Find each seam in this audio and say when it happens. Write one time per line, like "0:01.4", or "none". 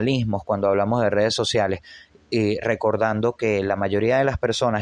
none

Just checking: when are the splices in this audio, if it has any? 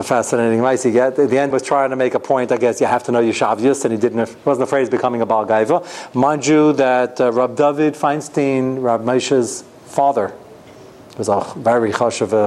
0:01.5

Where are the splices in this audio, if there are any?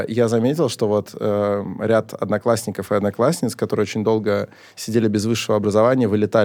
none

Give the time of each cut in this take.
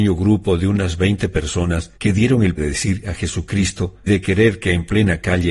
0:02.0
0:02.6
0:03.0
0:04.1

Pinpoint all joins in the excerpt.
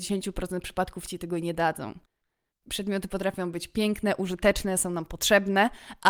none

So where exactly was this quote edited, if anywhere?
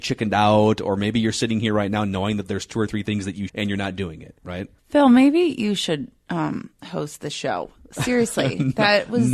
0:03.5
0:04.8

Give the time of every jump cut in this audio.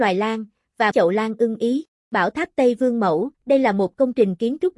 0:00.9
0:03.3

